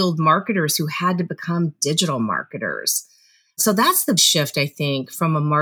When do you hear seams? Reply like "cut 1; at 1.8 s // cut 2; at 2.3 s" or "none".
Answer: cut 1; at 4.2 s